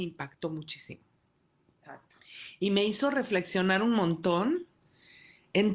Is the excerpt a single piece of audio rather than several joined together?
yes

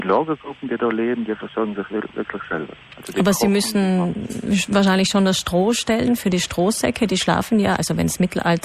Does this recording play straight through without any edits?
yes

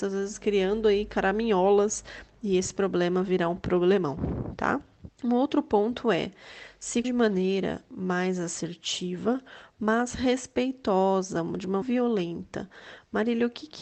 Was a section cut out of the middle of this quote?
yes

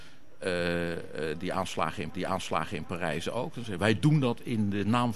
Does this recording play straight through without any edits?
no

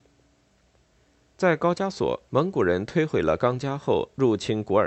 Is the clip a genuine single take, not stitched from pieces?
no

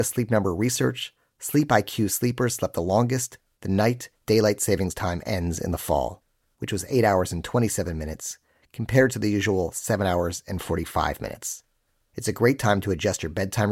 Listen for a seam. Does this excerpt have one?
no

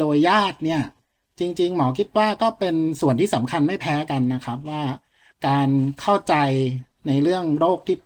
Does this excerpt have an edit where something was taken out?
no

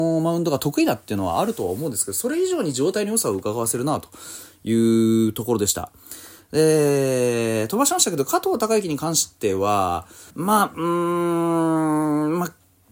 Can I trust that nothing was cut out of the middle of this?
no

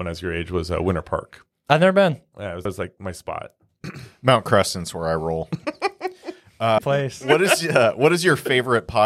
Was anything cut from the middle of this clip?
yes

